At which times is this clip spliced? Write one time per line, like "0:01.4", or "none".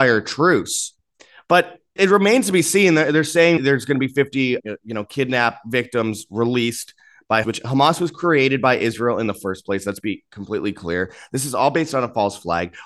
0:02.0
0:03.6
0:04.6
0:07.4